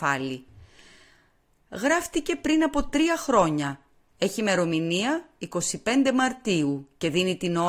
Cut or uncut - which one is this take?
uncut